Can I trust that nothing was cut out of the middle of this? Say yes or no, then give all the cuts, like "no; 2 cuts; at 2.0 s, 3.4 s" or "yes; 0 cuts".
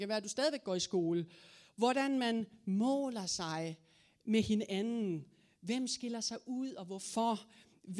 yes; 0 cuts